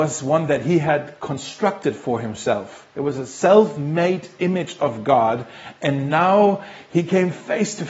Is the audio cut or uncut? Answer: uncut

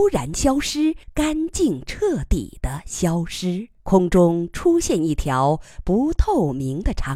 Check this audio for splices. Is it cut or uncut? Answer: cut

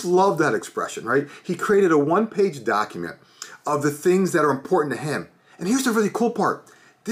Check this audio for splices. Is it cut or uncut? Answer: uncut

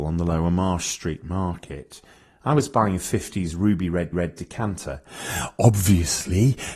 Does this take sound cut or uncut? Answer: cut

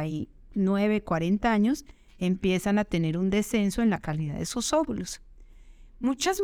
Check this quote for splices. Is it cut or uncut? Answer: uncut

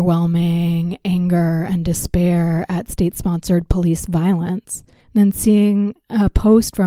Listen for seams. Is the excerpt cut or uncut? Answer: uncut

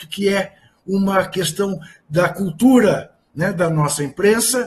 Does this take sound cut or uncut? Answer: uncut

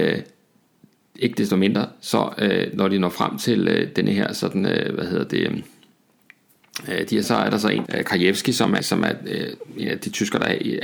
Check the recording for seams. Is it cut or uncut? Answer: cut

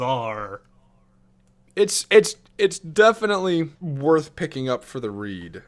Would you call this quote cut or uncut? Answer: cut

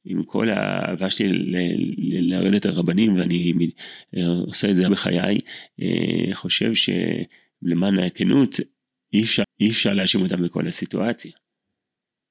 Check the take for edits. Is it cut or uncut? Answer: cut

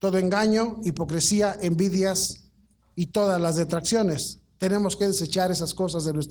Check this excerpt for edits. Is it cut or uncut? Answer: uncut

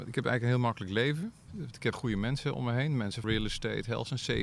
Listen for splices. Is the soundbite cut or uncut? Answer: cut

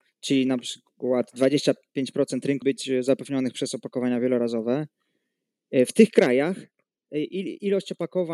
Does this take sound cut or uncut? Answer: cut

